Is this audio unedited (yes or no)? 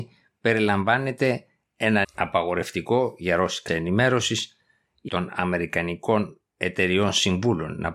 no